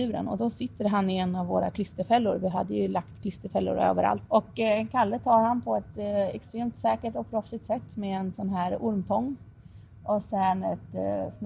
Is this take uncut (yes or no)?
yes